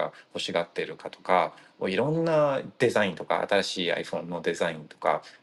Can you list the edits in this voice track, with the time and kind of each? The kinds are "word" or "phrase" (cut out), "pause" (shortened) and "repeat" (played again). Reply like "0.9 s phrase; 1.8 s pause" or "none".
none